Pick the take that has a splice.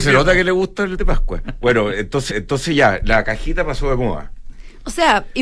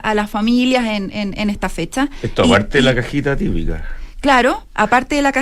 first; 2 cuts; at 1.0 s, 2.3 s

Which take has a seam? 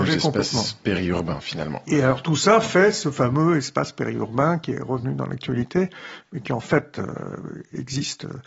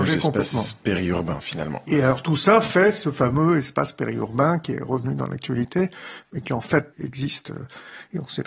second; 1 cut; at 6.9 s

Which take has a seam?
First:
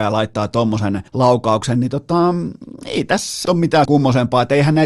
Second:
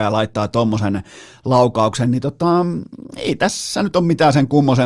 first; 3 cuts; at 1.1 s, 3.4 s, 3.8 s

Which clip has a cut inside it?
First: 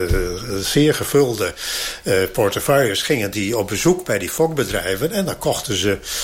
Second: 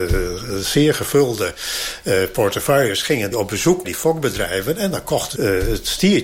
second; 3 cuts; at 3.3 s, 3.8 s, 5.3 s

